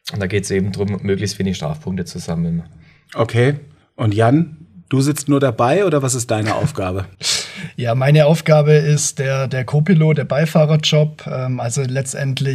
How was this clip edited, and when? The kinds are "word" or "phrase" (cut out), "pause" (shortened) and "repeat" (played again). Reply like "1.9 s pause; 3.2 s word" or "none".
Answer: 3.8 s pause; 7.1 s pause